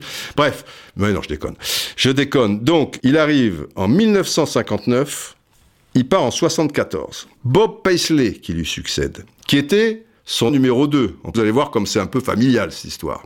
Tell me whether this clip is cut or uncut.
cut